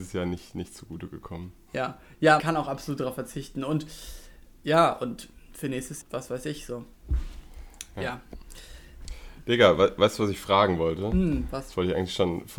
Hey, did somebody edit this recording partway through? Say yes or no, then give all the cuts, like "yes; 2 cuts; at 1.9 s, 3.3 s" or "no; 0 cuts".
yes; 2 cuts; at 2.4 s, 6.0 s